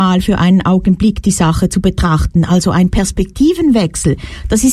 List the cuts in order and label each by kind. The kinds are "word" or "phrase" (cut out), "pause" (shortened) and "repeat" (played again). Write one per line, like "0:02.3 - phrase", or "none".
none